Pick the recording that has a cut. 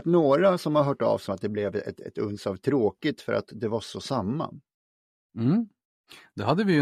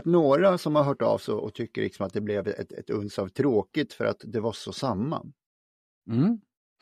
first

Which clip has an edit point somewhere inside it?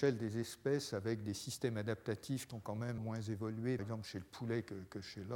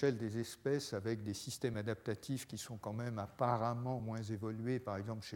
first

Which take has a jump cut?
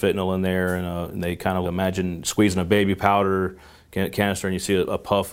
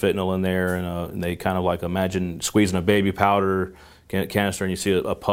first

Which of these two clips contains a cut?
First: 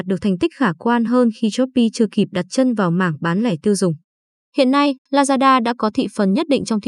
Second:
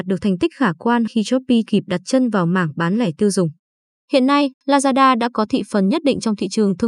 second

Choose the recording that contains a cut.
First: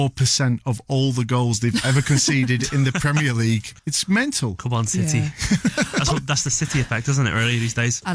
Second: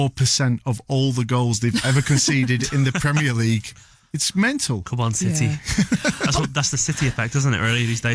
first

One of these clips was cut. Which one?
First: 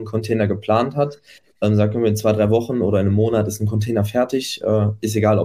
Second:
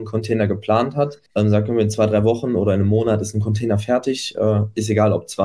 second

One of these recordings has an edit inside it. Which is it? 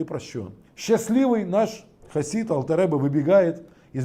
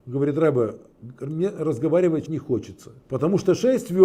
second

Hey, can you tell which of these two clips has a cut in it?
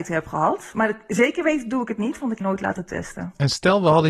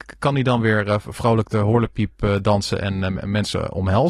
first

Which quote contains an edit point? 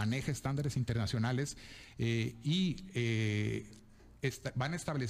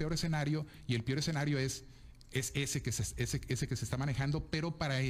first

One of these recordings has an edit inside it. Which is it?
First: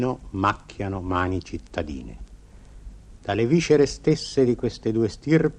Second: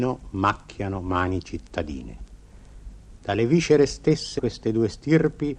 second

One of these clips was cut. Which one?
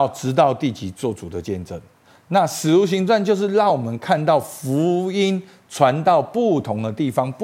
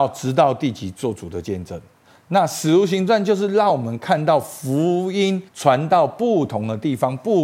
second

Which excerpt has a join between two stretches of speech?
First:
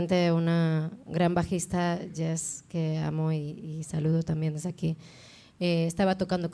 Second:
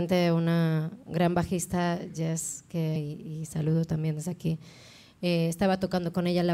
second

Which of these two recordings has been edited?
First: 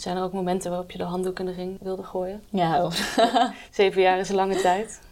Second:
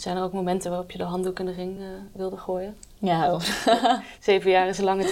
first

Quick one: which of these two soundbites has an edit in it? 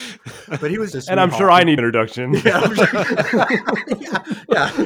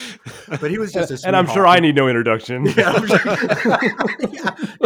first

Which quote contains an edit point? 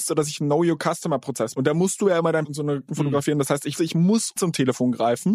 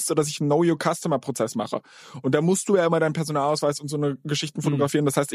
first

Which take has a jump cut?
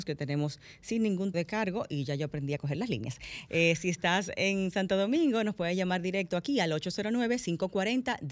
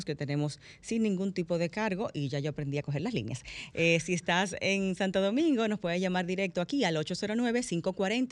first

